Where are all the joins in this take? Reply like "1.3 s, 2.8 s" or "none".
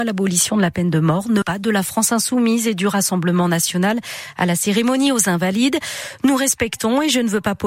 1.4 s